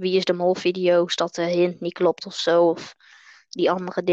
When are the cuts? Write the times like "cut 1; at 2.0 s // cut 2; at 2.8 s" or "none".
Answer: none